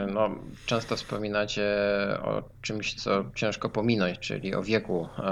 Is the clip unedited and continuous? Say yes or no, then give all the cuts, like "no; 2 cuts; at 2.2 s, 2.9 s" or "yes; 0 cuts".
yes; 0 cuts